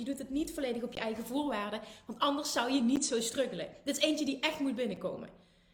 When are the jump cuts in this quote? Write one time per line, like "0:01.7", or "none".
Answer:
none